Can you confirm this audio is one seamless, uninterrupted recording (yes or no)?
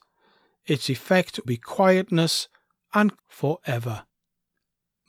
no